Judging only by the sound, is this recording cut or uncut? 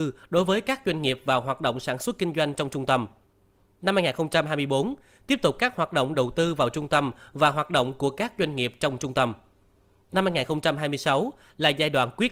uncut